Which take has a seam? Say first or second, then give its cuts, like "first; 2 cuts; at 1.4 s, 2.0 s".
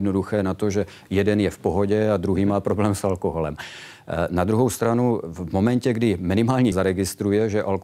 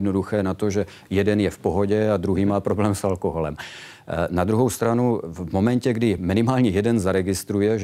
first; 1 cut; at 6.7 s